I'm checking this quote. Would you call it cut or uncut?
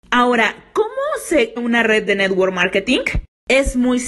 cut